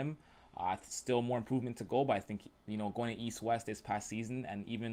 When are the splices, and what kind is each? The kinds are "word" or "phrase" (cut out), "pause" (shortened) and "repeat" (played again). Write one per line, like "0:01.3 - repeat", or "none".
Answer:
none

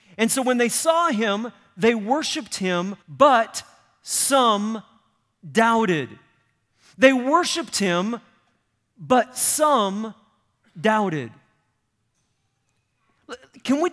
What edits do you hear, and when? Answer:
0:03.0 - pause

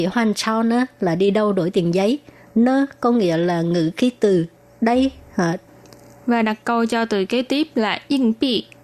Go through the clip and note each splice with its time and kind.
none

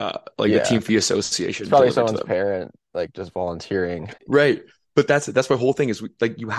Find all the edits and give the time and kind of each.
0:04.2 - pause

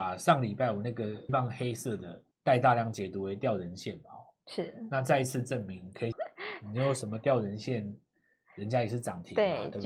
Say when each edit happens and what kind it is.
0:01.3 - word
0:02.3 - pause
0:06.1 - phrase

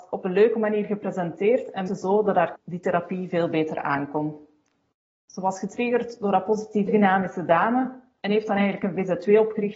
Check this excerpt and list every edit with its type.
0:01.9 - word
0:02.6 - word
0:06.9 - phrase

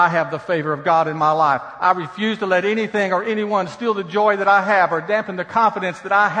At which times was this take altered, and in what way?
none

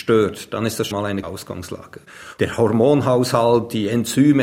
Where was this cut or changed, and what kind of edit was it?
0:00.9 - word
0:01.2 - word

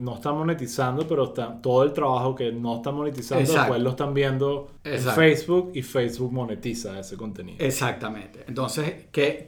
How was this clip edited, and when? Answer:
0:04.8 - pause

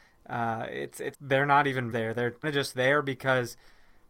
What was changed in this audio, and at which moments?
0:01.1 - word
0:01.9 - word
0:02.4 - word

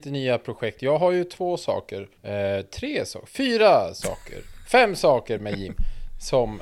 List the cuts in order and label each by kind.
0:02.2 - pause

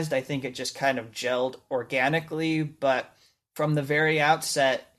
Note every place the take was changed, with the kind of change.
none

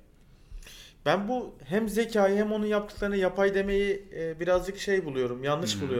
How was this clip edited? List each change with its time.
none

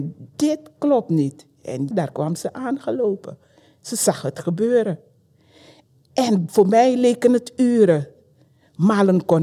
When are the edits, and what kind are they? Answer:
0:01.9 - word

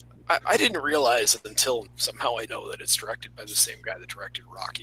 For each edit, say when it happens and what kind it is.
0:01.9 - word
0:02.5 - word

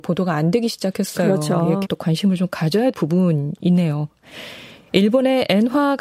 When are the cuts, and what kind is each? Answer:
0:01.8 - word
0:02.9 - word

